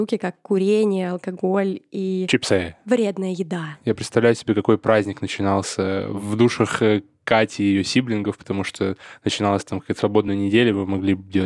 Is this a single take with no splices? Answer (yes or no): yes